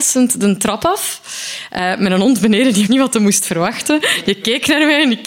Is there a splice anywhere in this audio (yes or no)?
yes